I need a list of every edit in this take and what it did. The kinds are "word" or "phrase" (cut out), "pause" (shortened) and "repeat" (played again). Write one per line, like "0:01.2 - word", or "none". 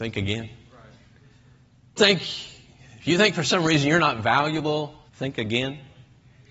0:02.0 - phrase
0:05.1 - pause